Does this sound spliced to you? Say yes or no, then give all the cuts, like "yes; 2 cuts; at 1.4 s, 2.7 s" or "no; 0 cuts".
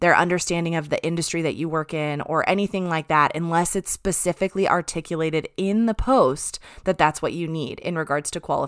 no; 0 cuts